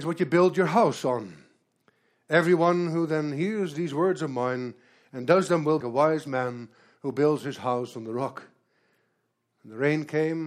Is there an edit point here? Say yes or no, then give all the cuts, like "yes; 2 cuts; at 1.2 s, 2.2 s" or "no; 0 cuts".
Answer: yes; 1 cut; at 5.8 s